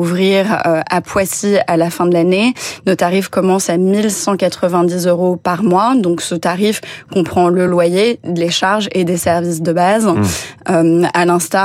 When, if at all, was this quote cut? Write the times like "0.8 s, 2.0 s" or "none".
none